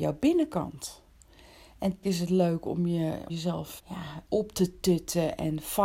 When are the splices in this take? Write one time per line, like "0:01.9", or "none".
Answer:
0:02.0
0:03.3
0:03.8
0:04.3